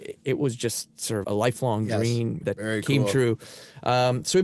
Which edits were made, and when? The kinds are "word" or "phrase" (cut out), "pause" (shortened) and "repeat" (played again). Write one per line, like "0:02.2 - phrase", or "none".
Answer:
0:01.2 - word
0:02.4 - word

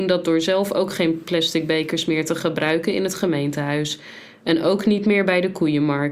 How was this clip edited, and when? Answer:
none

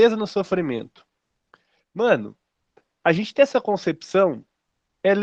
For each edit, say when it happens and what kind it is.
none

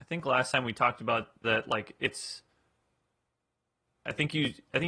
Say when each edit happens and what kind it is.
0:01.4 - phrase

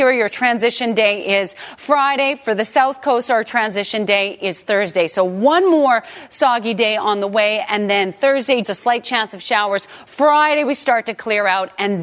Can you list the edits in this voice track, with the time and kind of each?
0:08.6 - word

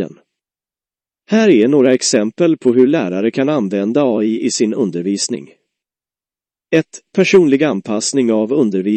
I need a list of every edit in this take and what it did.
none

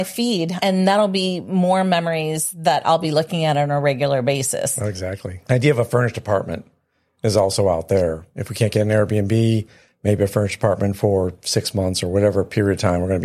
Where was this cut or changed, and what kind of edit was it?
none

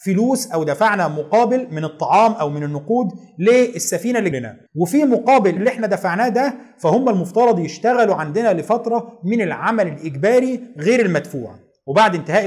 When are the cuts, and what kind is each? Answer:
0:04.3 - word
0:04.7 - pause
0:05.6 - word

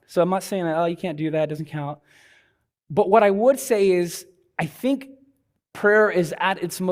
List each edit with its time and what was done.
none

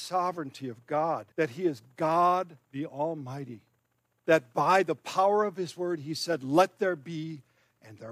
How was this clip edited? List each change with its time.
0:01.3 - pause
0:02.6 - pause
0:03.8 - pause

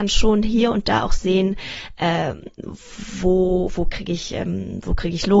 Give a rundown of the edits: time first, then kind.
none

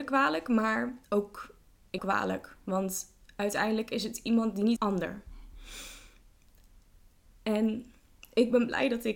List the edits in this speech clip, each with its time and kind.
0:01.0 - pause
0:02.0 - phrase
0:04.8 - phrase

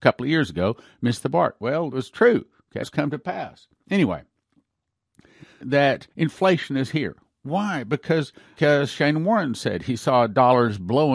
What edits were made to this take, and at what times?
0:01.9 - word
0:02.8 - word
0:05.6 - phrase
0:06.1 - pause
0:08.6 - word

